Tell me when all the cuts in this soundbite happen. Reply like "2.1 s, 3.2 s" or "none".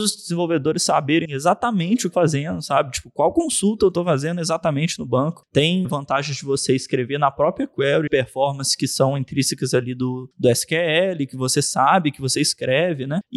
1.2 s, 2.1 s, 5.8 s, 8.1 s